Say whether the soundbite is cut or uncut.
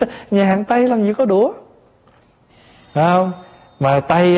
cut